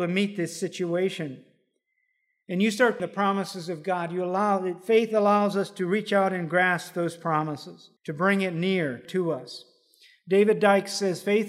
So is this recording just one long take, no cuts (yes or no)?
no